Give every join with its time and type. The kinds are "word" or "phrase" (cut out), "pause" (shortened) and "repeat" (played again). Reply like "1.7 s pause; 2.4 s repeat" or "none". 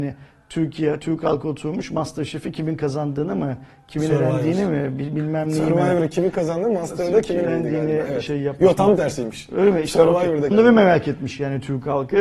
7.4 s word; 10.5 s word